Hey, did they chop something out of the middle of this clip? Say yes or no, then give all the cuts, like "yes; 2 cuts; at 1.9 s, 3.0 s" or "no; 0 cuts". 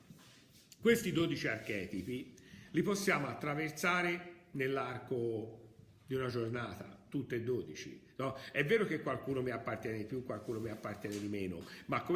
no; 0 cuts